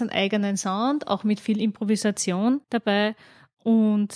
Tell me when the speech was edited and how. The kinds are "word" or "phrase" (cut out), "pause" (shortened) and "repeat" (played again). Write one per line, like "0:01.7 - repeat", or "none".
0:02.6 - pause